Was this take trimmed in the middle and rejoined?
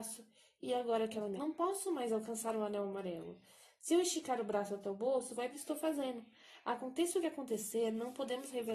yes; 2 cuts; at 1.4 s, 5.5 s

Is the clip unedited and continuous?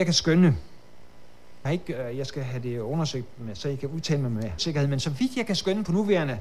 no; 2 cuts; at 1.6 s, 4.6 s

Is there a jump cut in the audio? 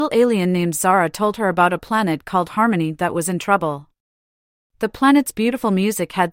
no; 0 cuts

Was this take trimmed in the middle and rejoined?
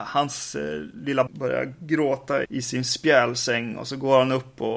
yes; 2 cuts; at 1.3 s, 2.4 s

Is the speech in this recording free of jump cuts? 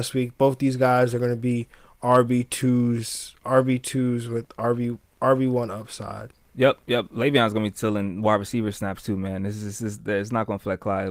yes; 0 cuts

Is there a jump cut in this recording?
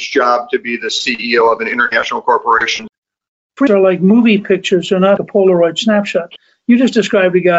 yes; 2 cuts; at 3.7 s, 5.2 s

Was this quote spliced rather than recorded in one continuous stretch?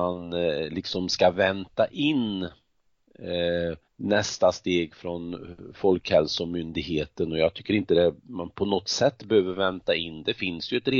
yes; 2 cuts; at 3.8 s, 8.2 s

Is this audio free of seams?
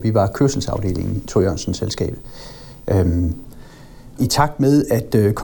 no; 2 cuts; at 1.2 s, 4.2 s

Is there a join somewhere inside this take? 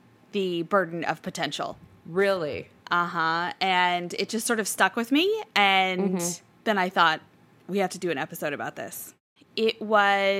no; 0 cuts

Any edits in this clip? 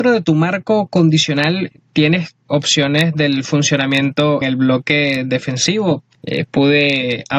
yes; 2 cuts; at 2.5 s, 4.4 s

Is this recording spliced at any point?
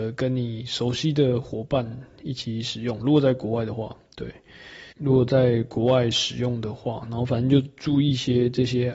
yes; 1 cut; at 4.9 s

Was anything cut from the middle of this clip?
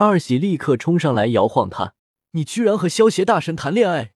yes; 1 cut; at 2.0 s

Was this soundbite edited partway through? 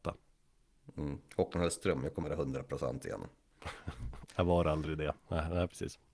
yes; 2 cuts; at 2.2 s, 4.2 s

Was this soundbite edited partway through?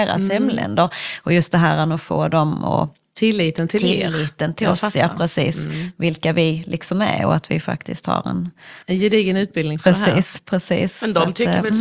yes; 1 cut; at 8.8 s

